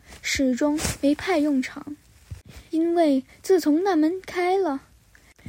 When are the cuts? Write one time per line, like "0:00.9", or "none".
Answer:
0:02.7